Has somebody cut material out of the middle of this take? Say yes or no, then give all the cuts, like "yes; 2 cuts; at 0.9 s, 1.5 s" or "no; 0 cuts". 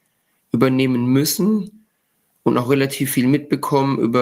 no; 0 cuts